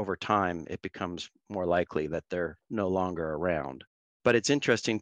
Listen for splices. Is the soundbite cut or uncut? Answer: uncut